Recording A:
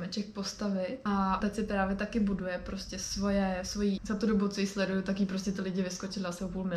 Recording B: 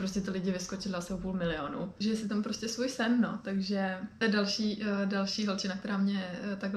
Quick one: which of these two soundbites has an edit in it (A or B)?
A